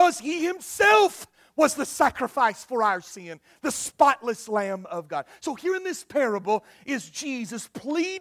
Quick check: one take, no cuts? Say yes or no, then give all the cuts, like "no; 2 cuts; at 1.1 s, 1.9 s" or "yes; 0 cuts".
yes; 0 cuts